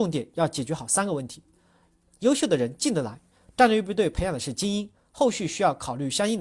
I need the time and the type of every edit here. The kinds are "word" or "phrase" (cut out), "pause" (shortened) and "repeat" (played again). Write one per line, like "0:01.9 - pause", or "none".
none